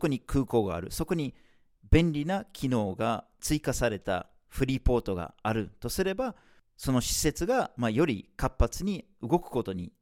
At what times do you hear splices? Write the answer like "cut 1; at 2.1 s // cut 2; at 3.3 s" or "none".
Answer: none